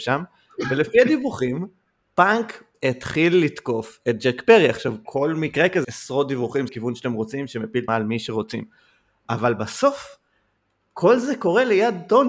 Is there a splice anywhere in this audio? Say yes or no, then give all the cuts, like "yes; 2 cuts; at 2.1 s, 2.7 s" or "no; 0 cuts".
yes; 5 cuts; at 2.7 s, 5.1 s, 5.8 s, 6.7 s, 7.9 s